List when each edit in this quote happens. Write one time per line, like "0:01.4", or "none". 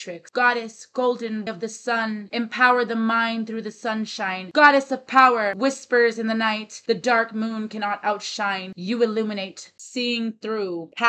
0:01.5
0:09.8